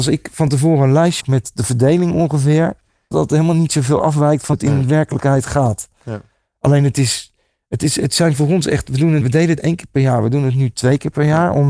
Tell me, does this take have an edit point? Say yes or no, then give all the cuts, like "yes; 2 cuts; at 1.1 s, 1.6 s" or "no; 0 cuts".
yes; 5 cuts; at 1.2 s, 3.1 s, 4.5 s, 9.2 s, 9.6 s